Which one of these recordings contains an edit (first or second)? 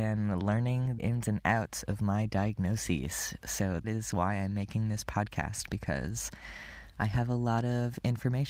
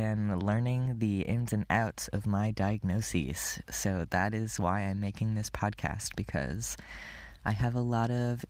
first